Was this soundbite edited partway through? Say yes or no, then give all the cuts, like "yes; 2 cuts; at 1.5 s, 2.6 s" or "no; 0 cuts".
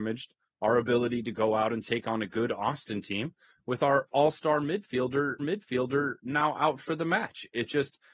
yes; 1 cut; at 5.4 s